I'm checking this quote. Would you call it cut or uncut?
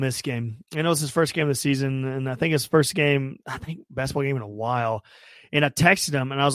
uncut